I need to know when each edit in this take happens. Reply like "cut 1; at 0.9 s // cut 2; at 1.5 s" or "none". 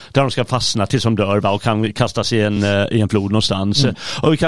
none

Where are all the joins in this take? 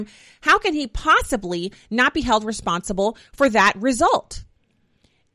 none

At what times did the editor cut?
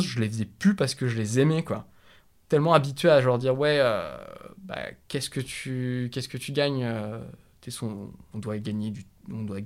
none

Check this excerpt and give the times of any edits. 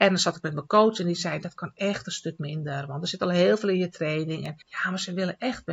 cut 1; at 4.6 s

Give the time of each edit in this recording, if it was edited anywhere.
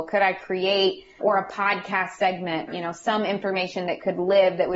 cut 1; at 1.2 s // cut 2; at 2.7 s

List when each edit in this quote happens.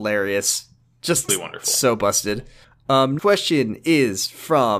cut 1; at 1.3 s // cut 2; at 3.2 s

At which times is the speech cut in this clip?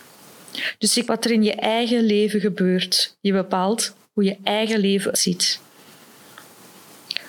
cut 1; at 1.0 s // cut 2; at 5.1 s

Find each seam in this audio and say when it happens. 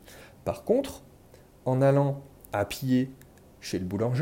none

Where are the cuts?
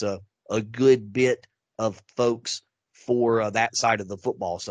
none

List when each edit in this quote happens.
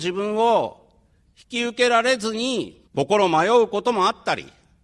cut 1; at 2.9 s

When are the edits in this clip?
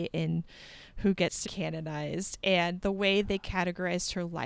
cut 1; at 1.4 s

